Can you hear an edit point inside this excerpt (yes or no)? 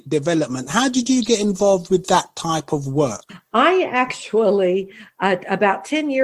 no